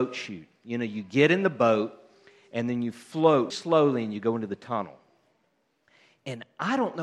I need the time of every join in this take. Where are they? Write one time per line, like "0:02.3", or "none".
0:03.5